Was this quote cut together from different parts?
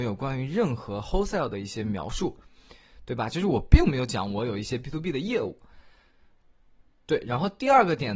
no; 0 cuts

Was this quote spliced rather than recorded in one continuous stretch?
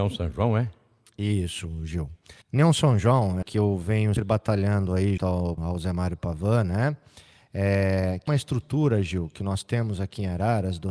yes; 6 cuts; at 2.4 s, 3.4 s, 4.2 s, 5.2 s, 5.6 s, 8.3 s

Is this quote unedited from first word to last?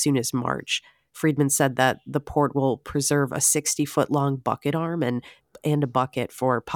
yes; 0 cuts

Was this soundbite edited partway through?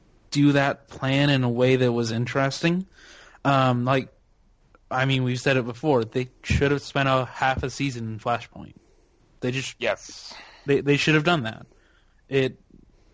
no; 0 cuts

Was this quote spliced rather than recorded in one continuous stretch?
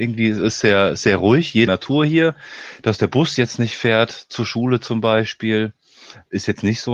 yes; 1 cut; at 1.7 s

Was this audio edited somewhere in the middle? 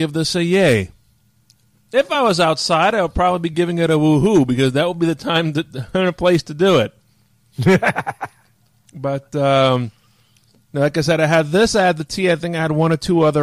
no; 0 cuts

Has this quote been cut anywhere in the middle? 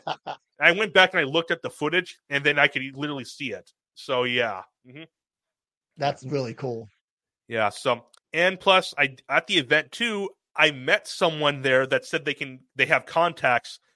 yes; 1 cut; at 8.2 s

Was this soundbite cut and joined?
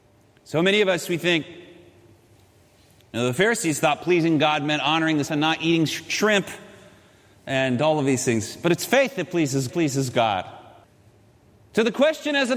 yes; 2 cuts; at 5.2 s, 9.7 s

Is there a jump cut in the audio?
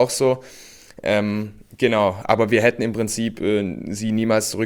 no; 0 cuts

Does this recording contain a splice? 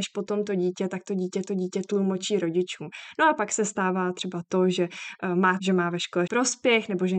yes; 3 cuts; at 1.5 s, 5.6 s, 6.3 s

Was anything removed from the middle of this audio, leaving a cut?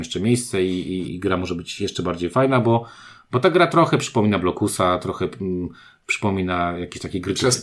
yes; 1 cut; at 1.1 s

